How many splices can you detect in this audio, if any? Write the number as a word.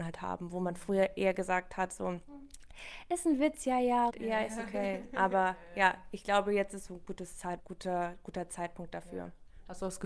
two